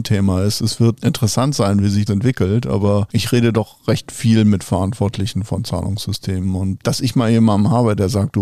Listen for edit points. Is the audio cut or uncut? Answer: cut